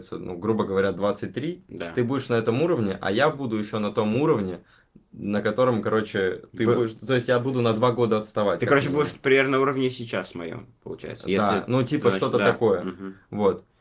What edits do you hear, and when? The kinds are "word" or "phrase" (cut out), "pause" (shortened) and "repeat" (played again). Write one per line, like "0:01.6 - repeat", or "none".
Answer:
none